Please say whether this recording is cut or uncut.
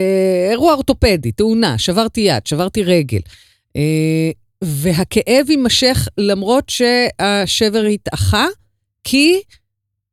uncut